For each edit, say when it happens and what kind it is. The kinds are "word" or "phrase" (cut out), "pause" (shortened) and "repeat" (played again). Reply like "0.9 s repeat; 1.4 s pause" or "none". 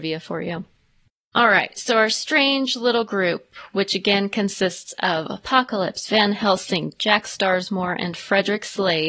none